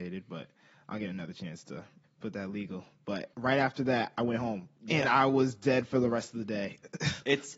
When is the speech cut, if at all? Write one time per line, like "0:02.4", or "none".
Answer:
0:02.0
0:03.3
0:04.8